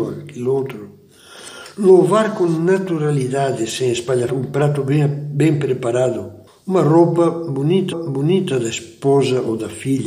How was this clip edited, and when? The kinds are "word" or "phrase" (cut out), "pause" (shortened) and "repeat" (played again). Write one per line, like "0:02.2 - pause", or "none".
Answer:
0:04.3 - word
0:06.5 - pause
0:07.9 - repeat